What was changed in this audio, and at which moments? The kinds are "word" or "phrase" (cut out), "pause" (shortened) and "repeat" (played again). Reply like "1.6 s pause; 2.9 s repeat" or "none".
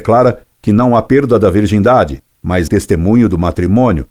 2.7 s phrase